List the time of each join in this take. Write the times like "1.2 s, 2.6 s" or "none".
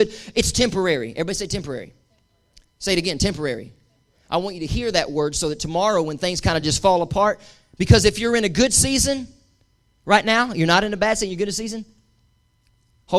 none

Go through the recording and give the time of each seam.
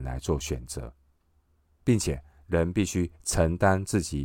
none

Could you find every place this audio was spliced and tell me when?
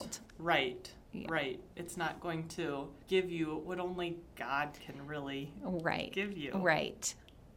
3.0 s

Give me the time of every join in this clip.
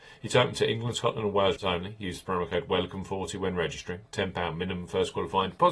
1.6 s

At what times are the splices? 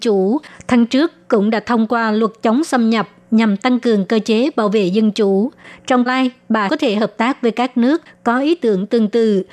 6.1 s, 6.7 s

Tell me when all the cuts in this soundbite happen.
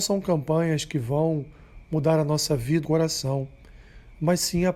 2.8 s

